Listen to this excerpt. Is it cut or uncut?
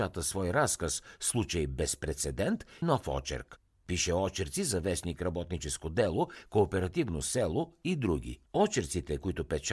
cut